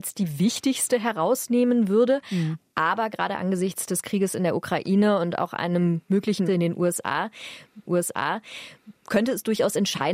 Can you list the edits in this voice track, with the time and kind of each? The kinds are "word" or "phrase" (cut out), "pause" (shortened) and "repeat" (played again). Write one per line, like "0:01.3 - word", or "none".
0:06.5 - word
0:07.9 - repeat